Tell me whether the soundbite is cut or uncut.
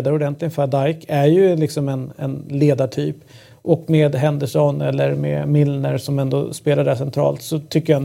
uncut